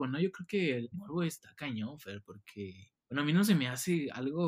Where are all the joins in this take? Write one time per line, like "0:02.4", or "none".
0:00.9
0:03.0